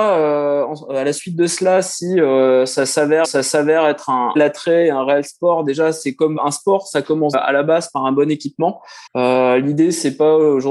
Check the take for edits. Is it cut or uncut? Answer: cut